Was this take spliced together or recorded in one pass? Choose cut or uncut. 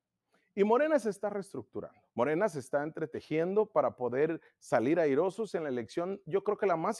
cut